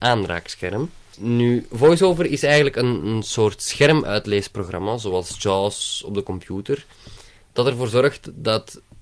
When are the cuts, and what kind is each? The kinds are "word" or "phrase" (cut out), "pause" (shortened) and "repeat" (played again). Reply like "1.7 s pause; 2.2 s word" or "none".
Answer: none

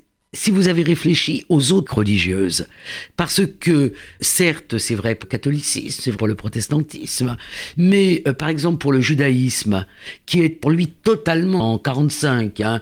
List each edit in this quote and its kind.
1.9 s word; 4.2 s word; 5.2 s word; 6.2 s word; 10.6 s word; 11.6 s word

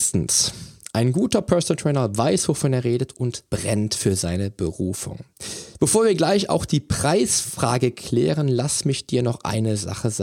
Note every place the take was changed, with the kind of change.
3.5 s pause

